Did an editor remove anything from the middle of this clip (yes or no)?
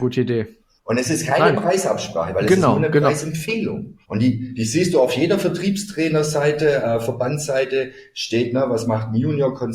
yes